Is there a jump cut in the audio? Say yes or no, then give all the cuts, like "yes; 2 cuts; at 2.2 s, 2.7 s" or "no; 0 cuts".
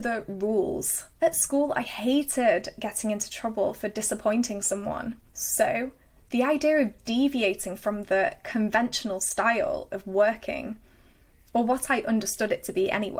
yes; 2 cuts; at 1.1 s, 5.3 s